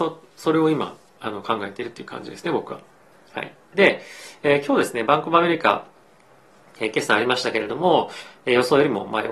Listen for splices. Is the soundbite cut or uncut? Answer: uncut